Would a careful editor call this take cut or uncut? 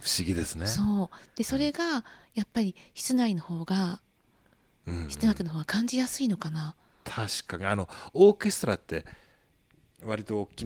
uncut